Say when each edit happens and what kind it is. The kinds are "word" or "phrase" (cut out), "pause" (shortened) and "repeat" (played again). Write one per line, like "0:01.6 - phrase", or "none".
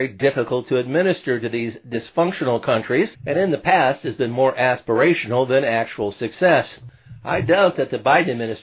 0:03.1 - pause